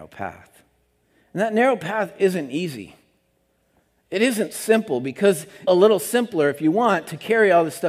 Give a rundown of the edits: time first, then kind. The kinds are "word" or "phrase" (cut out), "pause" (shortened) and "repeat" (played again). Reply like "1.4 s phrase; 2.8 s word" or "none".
5.7 s phrase